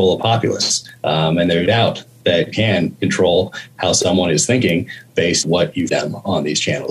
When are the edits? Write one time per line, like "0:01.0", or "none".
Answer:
0:01.7
0:02.5
0:05.4
0:05.9